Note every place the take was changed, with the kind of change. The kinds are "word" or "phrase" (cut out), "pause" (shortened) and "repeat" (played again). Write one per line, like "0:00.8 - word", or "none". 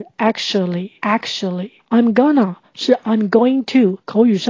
0:01.8 - pause